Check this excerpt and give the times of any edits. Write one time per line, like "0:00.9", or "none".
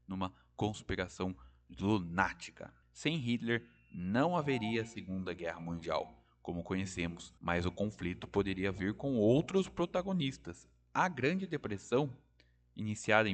0:02.8
0:07.4